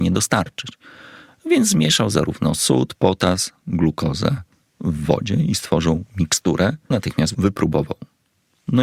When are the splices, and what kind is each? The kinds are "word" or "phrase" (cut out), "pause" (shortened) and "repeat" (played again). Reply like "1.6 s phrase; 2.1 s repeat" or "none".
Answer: 6.9 s word